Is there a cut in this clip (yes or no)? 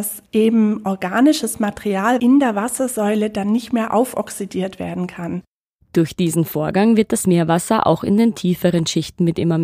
no